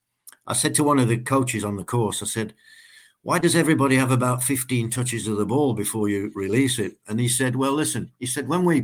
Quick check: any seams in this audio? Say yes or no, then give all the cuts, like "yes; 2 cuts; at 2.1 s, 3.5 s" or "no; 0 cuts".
no; 0 cuts